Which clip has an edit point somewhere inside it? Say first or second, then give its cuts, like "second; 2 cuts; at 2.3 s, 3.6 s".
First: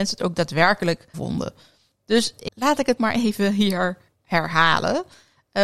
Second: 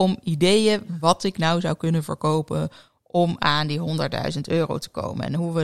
first; 3 cuts; at 1.1 s, 2.5 s, 3.0 s